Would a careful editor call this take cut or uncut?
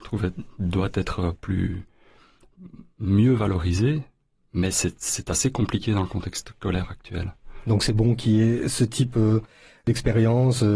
uncut